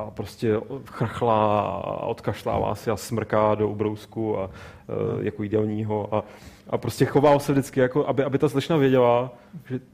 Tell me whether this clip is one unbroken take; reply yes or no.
yes